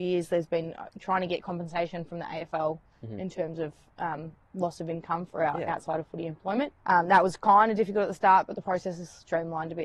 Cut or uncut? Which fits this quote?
cut